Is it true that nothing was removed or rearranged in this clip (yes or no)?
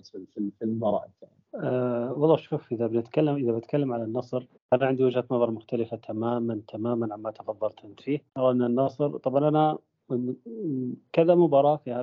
no